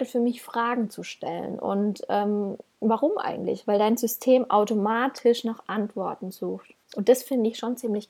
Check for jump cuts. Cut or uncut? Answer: cut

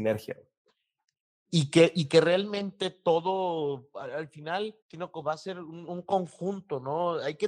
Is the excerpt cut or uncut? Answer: cut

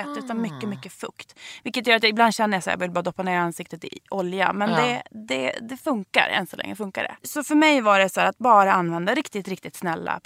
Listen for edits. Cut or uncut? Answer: uncut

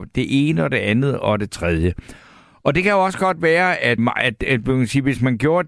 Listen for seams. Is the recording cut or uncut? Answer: cut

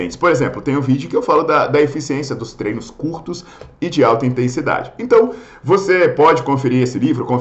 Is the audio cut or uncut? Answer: uncut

